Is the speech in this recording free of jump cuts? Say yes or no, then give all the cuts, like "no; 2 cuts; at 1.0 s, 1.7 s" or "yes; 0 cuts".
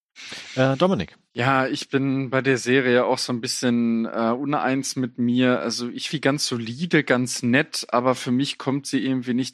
no; 2 cuts; at 1.3 s, 6.1 s